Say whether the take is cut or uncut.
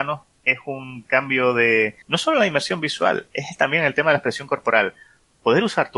cut